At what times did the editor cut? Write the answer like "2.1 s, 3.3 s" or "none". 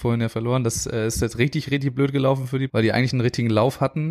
2.7 s